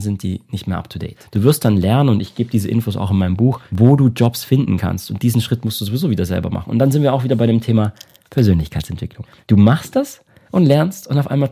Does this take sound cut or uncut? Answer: uncut